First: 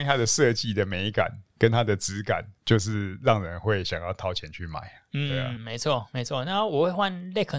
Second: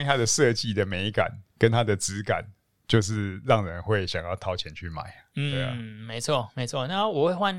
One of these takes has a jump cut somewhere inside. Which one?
first; 2 cuts; at 2.6 s, 5.6 s

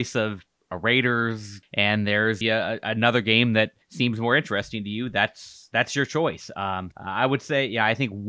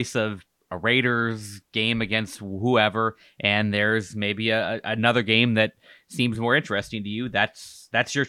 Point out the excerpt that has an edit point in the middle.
first; 4 cuts; at 1.6 s, 2.4 s, 3.8 s, 6.9 s

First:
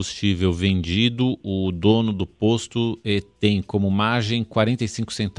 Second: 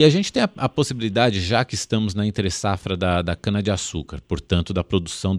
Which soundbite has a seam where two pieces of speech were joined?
first; 1 cut; at 1.4 s

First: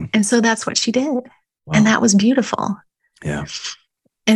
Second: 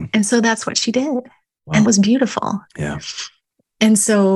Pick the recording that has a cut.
second; 2 cuts; at 1.8 s, 2.7 s

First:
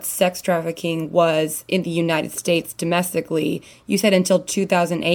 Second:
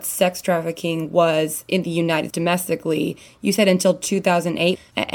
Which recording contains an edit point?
second; 1 cut; at 2.3 s

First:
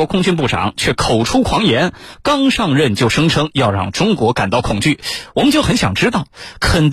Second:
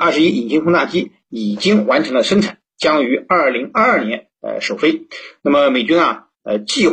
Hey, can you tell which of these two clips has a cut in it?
second; 1 cut; at 4.3 s

